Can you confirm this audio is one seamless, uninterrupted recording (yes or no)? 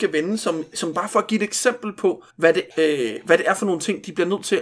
no